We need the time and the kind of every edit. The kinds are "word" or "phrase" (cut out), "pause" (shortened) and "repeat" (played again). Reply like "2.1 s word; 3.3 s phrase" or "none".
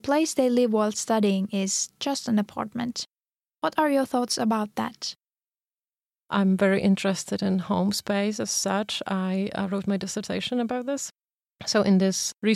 none